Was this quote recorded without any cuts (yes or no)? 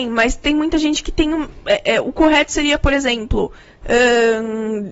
yes